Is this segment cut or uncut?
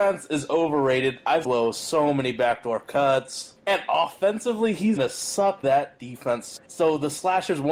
cut